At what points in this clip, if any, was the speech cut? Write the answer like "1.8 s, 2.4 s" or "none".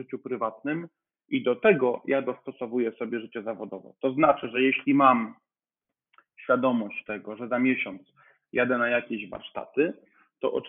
none